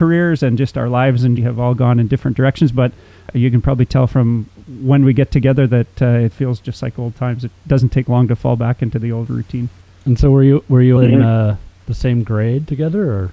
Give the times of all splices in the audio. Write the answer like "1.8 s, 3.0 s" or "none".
1.4 s, 6.3 s, 11.0 s